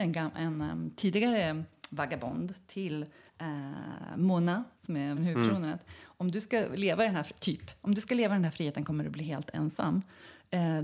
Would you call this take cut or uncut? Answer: cut